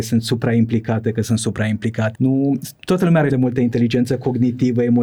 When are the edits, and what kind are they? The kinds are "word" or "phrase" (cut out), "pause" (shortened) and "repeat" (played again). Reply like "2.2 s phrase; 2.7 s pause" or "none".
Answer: 2.1 s word; 2.8 s pause; 3.3 s word